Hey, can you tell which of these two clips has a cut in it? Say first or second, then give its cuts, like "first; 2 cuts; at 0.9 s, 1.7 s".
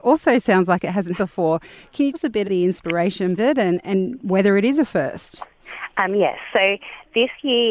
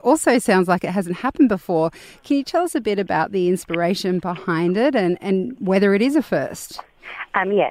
first; 4 cuts; at 1.2 s, 2.1 s, 2.4 s, 3.4 s